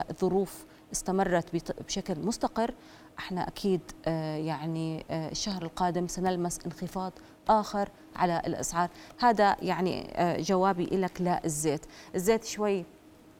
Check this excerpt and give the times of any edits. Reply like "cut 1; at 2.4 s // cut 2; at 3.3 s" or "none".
none

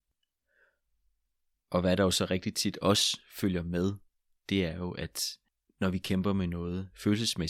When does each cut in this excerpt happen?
none

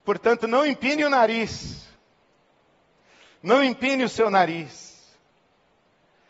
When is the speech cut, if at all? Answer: none

